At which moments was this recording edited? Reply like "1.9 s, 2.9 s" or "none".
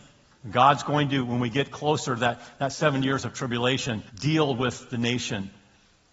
4.1 s